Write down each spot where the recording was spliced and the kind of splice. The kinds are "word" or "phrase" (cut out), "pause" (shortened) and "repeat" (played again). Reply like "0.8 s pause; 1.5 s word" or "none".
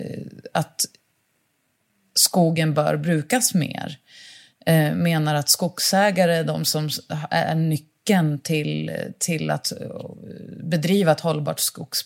none